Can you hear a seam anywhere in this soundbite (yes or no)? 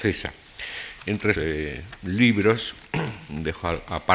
yes